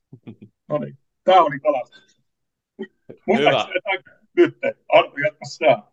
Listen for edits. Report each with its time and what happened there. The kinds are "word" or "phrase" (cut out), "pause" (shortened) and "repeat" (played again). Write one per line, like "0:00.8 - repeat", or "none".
none